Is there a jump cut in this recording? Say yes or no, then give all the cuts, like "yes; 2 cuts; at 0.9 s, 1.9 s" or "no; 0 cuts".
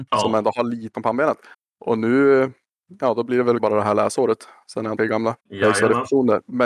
yes; 5 cuts; at 0.9 s, 1.5 s, 3.6 s, 5.0 s, 5.4 s